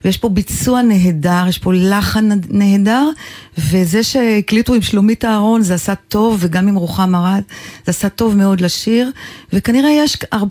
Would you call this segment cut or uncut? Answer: uncut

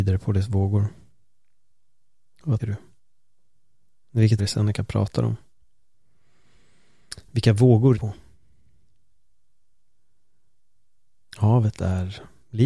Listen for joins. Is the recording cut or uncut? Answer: cut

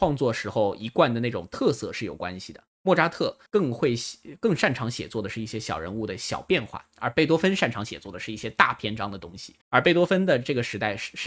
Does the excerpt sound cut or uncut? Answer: cut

